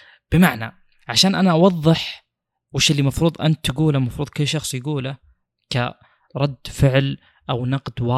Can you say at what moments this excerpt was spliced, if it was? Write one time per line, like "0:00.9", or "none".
none